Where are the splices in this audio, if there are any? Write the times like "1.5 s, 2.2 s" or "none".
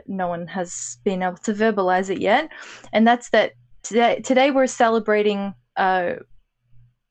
none